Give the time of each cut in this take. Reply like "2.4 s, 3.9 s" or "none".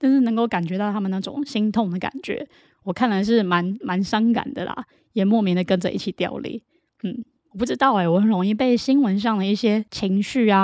none